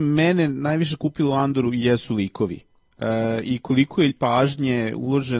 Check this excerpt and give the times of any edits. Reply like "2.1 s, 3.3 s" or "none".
4.1 s